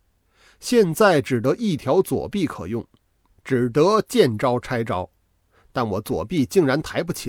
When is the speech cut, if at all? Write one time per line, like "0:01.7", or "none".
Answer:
none